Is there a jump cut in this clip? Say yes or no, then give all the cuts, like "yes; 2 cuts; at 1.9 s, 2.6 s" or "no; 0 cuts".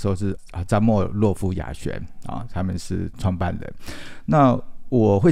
no; 0 cuts